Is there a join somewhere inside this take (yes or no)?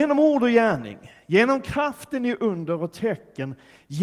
no